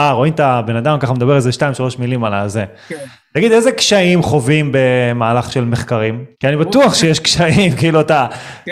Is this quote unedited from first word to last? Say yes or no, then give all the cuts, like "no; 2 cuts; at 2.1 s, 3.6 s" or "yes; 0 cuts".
no; 1 cut; at 6.3 s